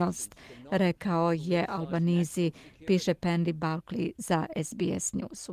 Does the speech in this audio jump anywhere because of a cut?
no; 0 cuts

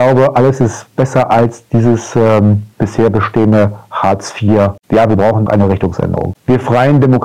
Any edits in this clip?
yes; 2 cuts; at 2.7 s, 5.5 s

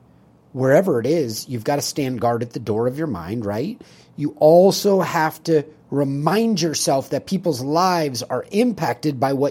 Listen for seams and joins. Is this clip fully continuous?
yes; 0 cuts

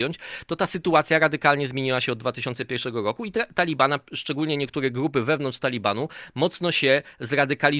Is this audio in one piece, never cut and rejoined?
yes; 0 cuts

